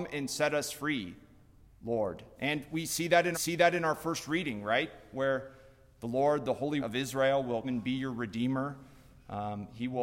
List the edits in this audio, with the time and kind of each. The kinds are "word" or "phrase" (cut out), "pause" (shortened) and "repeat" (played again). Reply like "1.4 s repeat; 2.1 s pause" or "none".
3.3 s repeat; 6.8 s word; 7.6 s word